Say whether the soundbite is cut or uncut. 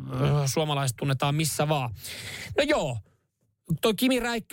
uncut